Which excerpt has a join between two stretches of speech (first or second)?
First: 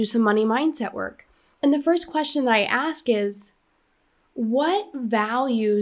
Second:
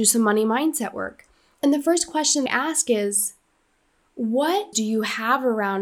second